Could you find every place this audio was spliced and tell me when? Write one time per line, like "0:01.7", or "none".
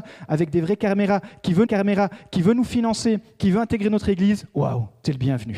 0:01.7